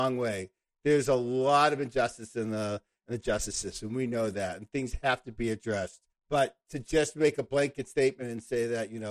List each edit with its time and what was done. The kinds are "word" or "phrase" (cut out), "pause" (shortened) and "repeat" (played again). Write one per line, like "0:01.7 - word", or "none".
0:06.1 - pause